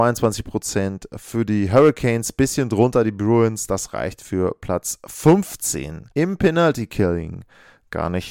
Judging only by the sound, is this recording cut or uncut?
cut